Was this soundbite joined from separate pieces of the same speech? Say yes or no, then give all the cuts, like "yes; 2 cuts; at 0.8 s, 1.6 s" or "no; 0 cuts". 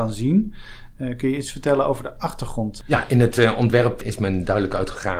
no; 0 cuts